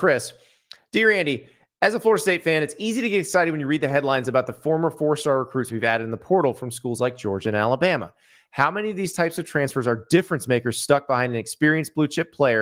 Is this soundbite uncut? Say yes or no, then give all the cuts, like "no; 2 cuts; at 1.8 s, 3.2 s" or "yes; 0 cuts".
yes; 0 cuts